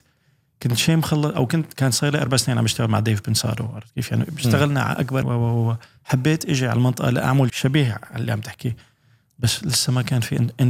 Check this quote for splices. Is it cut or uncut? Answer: cut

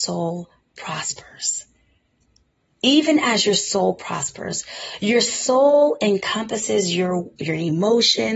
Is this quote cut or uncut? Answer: uncut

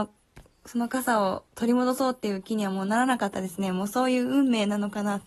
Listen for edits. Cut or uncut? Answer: cut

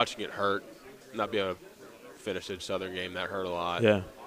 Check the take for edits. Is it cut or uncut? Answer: cut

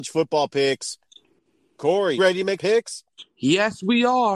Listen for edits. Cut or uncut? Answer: cut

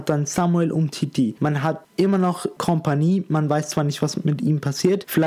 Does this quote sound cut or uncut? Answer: uncut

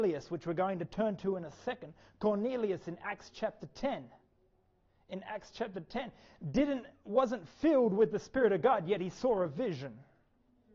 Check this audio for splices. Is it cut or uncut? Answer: uncut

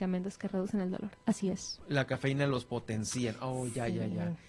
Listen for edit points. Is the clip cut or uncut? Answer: uncut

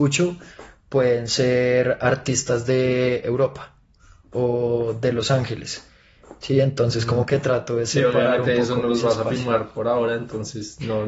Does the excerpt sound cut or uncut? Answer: uncut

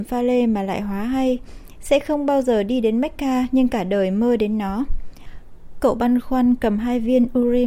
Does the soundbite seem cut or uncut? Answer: uncut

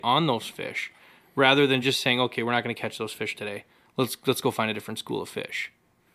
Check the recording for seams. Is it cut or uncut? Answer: uncut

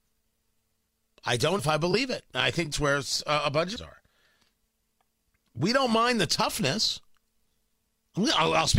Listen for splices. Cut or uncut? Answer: cut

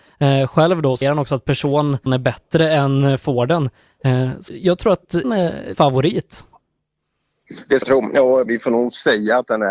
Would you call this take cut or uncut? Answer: cut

